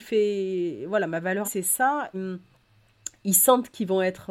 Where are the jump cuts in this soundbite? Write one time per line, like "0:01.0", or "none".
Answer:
0:01.4
0:02.1